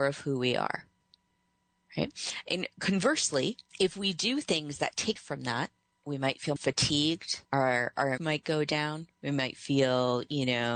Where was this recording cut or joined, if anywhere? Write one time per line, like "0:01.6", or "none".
0:03.7
0:05.2
0:06.0
0:06.6
0:07.4
0:08.2